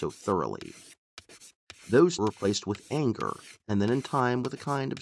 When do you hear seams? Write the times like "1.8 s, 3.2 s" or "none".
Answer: 2.2 s, 3.6 s

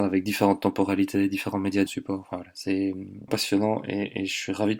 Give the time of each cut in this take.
1.9 s, 3.3 s

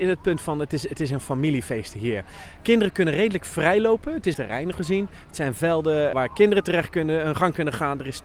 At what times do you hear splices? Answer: 4.3 s, 4.7 s, 6.1 s

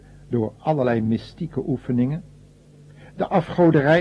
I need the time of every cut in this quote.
none

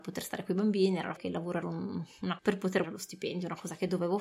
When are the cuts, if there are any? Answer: 1.2 s, 1.6 s, 2.4 s, 2.8 s

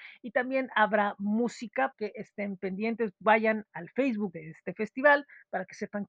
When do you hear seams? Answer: 1.9 s, 3.7 s, 4.3 s

